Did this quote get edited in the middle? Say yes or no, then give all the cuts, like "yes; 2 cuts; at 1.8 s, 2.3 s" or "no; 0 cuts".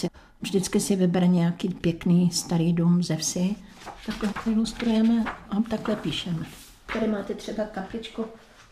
no; 0 cuts